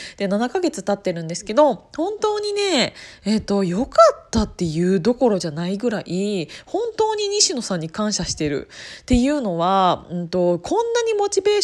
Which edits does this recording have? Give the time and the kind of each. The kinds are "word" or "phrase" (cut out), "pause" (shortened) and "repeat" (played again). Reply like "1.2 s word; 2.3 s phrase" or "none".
none